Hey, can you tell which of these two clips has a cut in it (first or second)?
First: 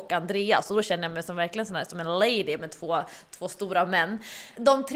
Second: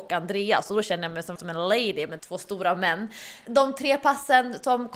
second